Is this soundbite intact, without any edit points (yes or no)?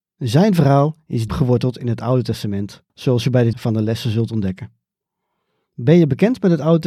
no